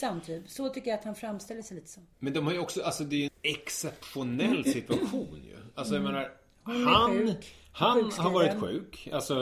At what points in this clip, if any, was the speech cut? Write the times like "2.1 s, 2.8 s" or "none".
3.3 s